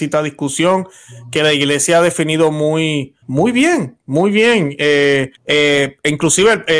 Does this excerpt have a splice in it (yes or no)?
yes